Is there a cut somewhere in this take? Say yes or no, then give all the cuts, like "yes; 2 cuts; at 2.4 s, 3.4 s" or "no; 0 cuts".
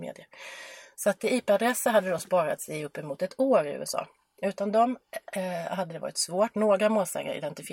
no; 0 cuts